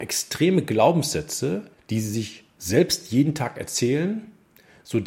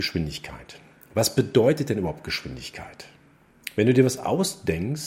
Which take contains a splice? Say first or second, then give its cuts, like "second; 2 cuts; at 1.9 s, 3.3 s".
first; 1 cut; at 1.7 s